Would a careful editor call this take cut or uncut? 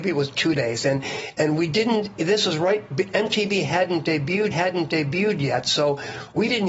cut